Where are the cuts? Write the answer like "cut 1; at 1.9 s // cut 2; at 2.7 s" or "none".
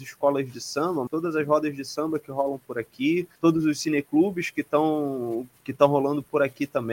cut 1; at 1.1 s // cut 2; at 3.4 s